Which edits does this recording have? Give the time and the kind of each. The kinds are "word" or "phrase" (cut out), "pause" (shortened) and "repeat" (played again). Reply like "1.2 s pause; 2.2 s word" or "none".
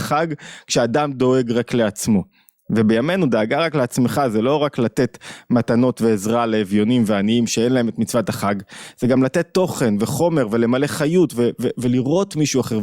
none